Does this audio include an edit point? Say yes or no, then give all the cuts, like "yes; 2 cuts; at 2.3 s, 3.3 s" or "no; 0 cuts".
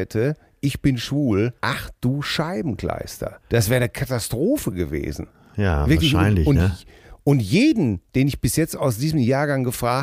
yes; 2 cuts; at 1.6 s, 3.4 s